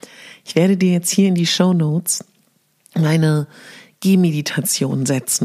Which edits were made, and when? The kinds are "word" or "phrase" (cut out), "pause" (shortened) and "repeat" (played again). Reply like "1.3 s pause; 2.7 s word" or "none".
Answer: none